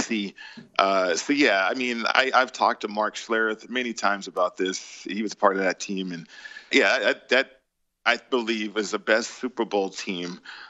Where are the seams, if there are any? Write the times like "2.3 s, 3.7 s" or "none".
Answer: 6.7 s